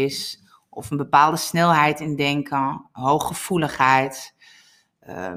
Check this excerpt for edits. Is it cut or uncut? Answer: uncut